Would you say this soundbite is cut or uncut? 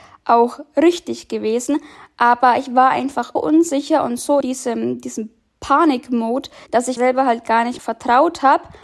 cut